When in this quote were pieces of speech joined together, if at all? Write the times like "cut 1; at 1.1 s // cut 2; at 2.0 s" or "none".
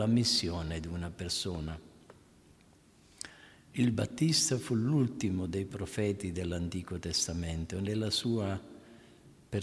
none